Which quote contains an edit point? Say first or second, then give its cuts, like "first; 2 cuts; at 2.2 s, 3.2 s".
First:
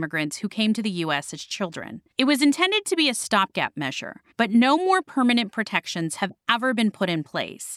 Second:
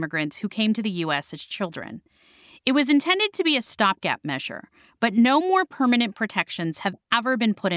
first; 2 cuts; at 2.1 s, 4.3 s